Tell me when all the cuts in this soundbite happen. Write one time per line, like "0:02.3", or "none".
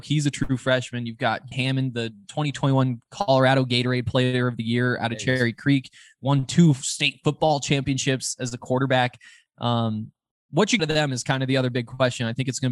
0:01.5
0:10.3
0:10.8

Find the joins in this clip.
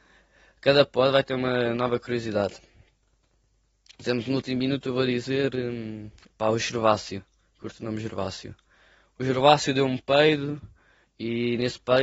none

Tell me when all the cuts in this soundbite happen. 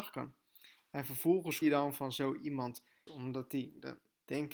0:01.6
0:03.1

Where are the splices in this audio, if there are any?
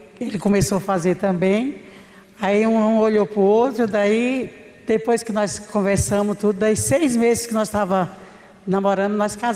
none

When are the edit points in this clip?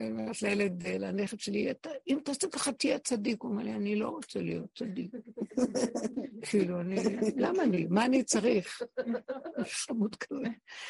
none

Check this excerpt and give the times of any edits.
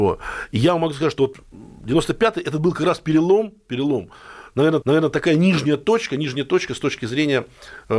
0:04.8

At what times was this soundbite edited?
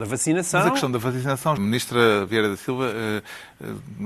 0:01.6

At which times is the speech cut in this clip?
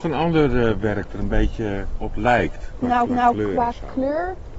0:01.1
0:03.1

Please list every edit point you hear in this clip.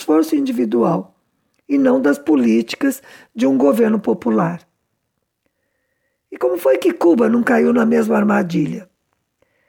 none

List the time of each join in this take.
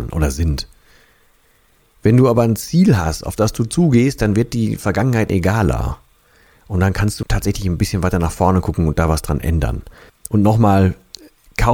0:05.3
0:07.2
0:10.1

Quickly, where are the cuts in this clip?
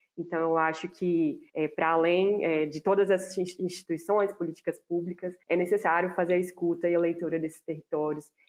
0:01.5
0:05.4

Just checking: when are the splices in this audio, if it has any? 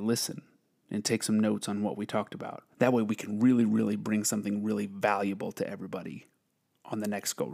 0:02.7

